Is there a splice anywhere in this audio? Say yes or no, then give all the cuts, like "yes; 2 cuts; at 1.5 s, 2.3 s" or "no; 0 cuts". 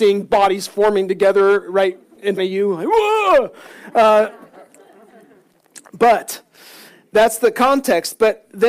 yes; 1 cut; at 2.4 s